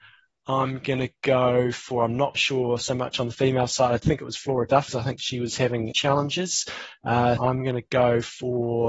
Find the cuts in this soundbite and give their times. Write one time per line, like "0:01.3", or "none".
0:02.3
0:04.0
0:04.9
0:05.9
0:07.4